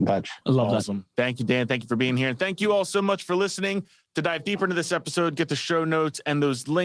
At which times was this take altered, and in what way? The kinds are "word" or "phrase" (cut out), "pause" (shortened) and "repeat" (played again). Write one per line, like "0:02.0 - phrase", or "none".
none

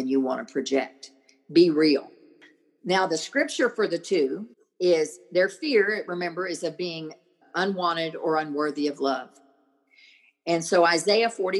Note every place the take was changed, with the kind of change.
0:04.5 - pause
0:07.4 - word

